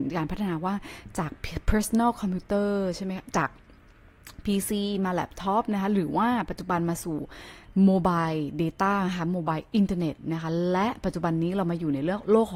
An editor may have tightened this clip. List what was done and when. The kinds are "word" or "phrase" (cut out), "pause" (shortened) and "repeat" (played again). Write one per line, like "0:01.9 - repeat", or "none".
none